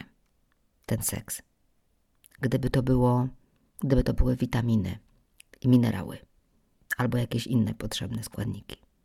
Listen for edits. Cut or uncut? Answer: uncut